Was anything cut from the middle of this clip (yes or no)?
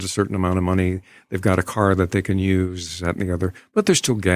no